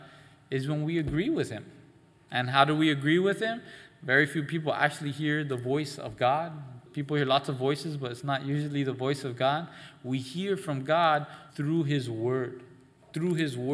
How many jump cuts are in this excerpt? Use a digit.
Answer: 1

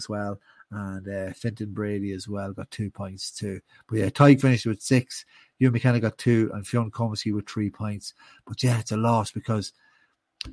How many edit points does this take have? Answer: 0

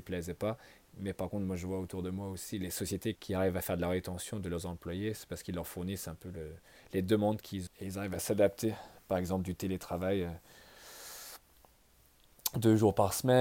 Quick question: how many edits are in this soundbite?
2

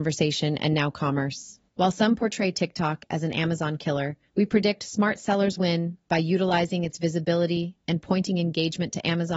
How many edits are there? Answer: 3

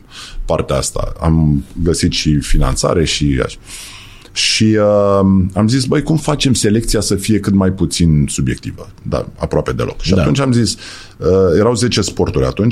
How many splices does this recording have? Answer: 0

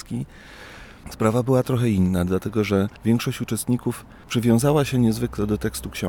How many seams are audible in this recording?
1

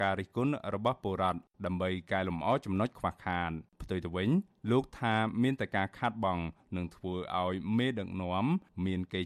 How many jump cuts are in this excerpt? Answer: 1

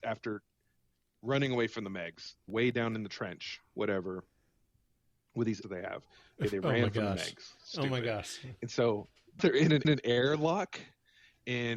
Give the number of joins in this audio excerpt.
4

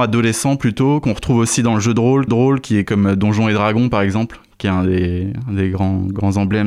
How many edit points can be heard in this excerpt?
1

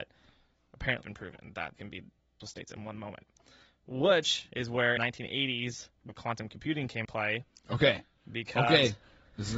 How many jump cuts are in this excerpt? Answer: 6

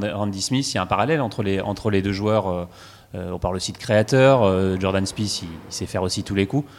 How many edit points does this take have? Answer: 0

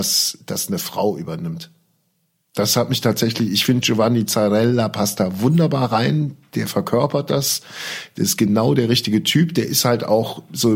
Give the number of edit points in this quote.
0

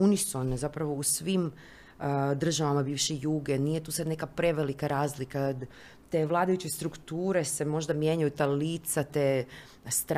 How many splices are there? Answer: 0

